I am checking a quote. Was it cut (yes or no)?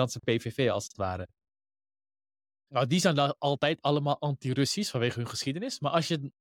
no